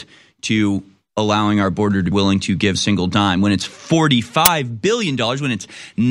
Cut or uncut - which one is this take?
cut